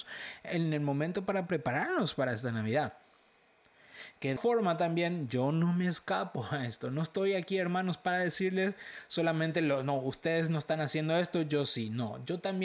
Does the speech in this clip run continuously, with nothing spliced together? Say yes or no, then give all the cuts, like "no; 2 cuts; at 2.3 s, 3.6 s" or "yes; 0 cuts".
no; 1 cut; at 4.4 s